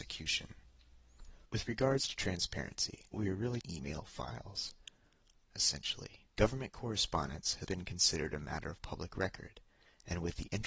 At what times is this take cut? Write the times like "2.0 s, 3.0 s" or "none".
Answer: 1.5 s, 3.1 s, 3.6 s, 5.5 s, 6.3 s, 7.6 s